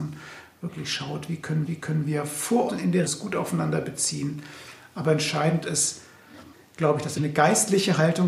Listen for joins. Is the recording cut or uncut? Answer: cut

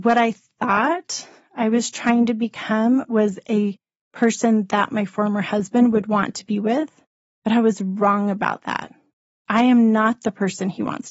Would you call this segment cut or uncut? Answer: uncut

